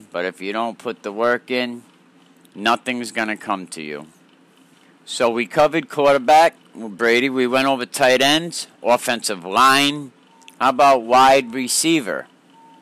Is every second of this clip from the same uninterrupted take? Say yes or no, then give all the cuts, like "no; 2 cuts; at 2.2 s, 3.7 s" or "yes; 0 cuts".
yes; 0 cuts